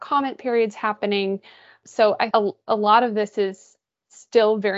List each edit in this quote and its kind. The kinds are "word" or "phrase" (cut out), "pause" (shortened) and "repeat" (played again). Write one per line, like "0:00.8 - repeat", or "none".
0:02.3 - word